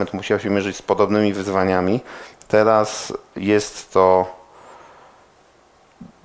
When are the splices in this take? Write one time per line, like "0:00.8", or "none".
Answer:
none